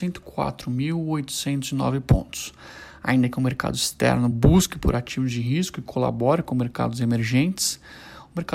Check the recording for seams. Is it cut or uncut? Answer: uncut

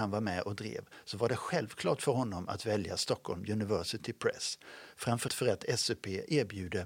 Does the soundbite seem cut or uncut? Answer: cut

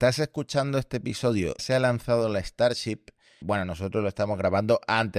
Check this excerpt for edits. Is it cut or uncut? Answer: cut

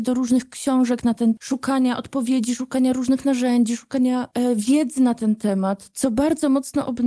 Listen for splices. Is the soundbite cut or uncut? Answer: cut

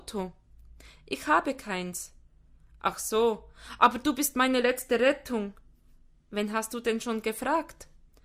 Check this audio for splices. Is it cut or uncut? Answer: uncut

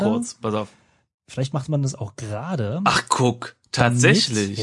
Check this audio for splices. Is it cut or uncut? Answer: uncut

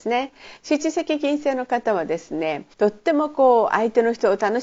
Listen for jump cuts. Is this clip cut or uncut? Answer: cut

